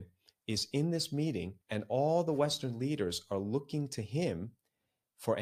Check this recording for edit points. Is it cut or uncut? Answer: cut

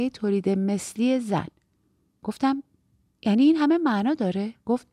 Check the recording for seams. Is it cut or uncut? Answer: uncut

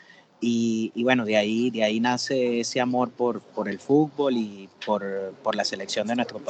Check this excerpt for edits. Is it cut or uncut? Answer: uncut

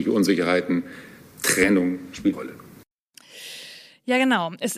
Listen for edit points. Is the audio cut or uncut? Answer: cut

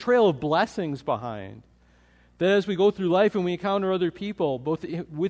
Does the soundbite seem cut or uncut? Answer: uncut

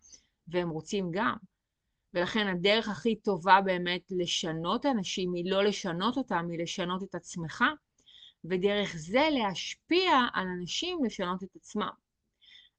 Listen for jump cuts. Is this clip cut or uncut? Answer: uncut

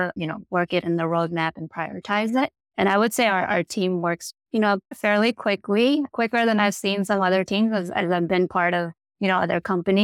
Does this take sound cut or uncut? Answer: uncut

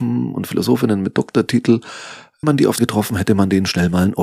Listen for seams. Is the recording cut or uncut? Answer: cut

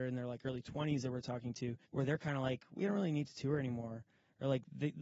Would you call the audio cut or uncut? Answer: cut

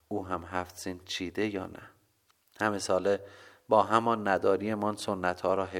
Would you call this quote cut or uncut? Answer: uncut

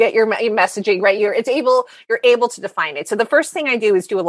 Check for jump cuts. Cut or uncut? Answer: uncut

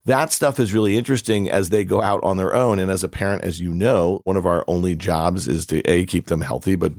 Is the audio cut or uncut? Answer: uncut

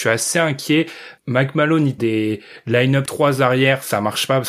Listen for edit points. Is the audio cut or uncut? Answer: cut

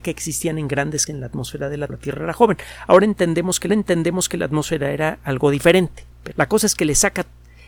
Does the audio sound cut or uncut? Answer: cut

